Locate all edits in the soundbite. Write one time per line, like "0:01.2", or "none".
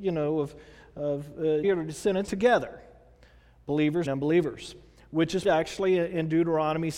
0:01.6
0:02.3
0:04.1
0:05.4